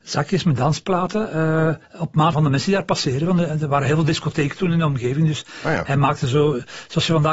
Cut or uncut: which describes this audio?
cut